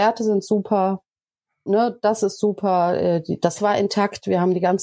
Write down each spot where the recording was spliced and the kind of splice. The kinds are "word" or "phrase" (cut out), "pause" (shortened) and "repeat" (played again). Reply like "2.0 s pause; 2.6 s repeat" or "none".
3.6 s word